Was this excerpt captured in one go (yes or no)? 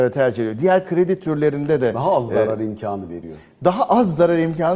yes